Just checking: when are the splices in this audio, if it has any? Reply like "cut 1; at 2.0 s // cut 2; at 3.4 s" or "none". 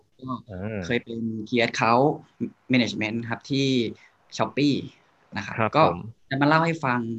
none

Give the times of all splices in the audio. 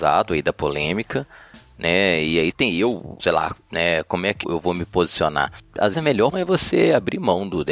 cut 1; at 2.5 s // cut 2; at 3.2 s // cut 3; at 4.4 s // cut 4; at 5.9 s // cut 5; at 6.3 s

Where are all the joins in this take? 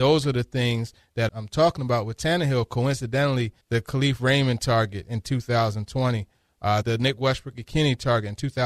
cut 1; at 1.3 s // cut 2; at 3.6 s // cut 3; at 6.8 s

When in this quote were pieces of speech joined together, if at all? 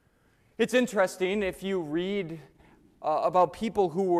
none

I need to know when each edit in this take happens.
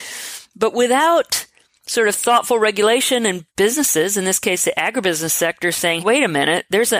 cut 1; at 3.5 s // cut 2; at 6.0 s

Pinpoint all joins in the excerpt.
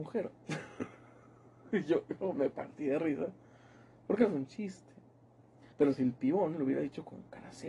cut 1; at 5.7 s

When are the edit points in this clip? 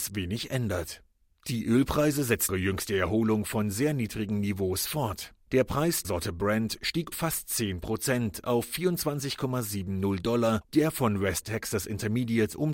cut 1; at 2.5 s // cut 2; at 6.0 s // cut 3; at 7.1 s // cut 4; at 10.7 s

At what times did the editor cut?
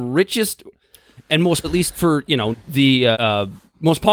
cut 1; at 1.6 s // cut 2; at 2.5 s // cut 3; at 3.1 s

